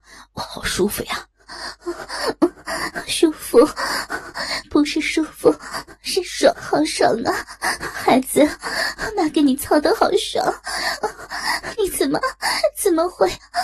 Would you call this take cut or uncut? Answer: cut